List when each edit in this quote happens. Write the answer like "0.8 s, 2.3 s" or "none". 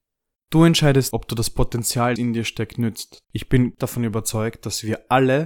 1.1 s, 2.2 s, 3.2 s, 3.8 s